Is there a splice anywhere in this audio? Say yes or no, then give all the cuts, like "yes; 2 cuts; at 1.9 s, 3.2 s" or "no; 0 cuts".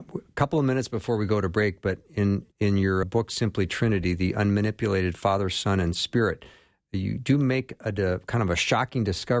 yes; 2 cuts; at 2.5 s, 3.0 s